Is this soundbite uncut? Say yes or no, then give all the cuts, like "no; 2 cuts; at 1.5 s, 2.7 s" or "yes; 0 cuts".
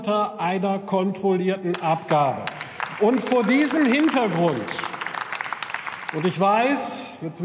yes; 0 cuts